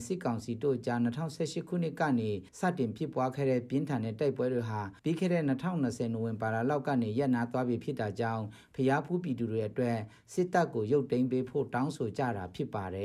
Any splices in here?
yes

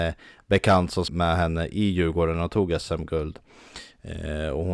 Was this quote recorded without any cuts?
no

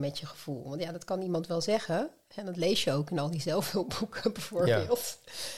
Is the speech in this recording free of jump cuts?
yes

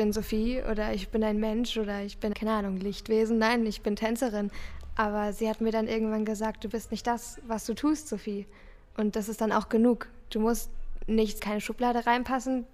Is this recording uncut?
no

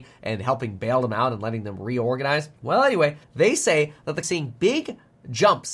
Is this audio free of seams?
no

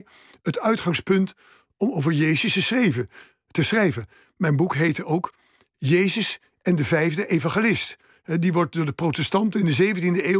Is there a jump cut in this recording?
no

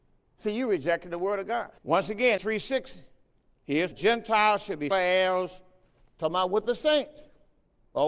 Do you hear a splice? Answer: yes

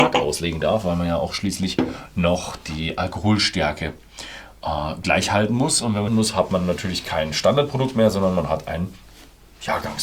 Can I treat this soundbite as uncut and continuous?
no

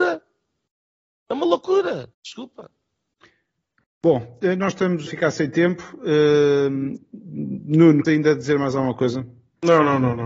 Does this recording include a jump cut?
yes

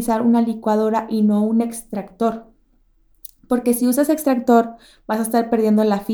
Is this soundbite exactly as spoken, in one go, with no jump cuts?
yes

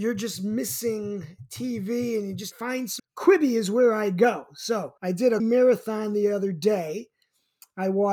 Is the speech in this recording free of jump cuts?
no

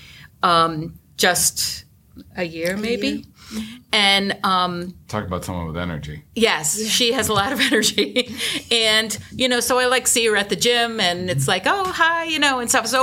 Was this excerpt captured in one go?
yes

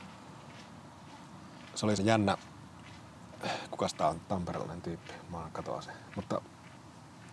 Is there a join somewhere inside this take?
yes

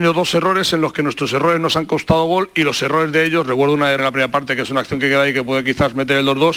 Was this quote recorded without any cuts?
no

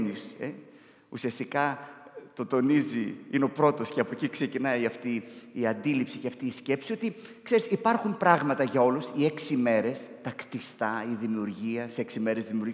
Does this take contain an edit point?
no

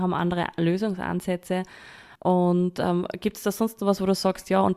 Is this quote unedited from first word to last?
no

